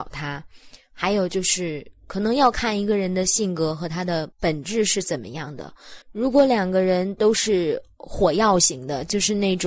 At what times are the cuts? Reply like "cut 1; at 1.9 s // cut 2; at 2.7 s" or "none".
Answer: cut 1; at 4.3 s // cut 2; at 6.0 s